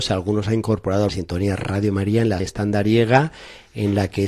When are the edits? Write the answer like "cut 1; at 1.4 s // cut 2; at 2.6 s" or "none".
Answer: cut 1; at 1.1 s // cut 2; at 2.4 s